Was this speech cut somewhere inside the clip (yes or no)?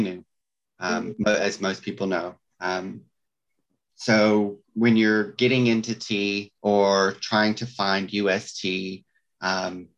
yes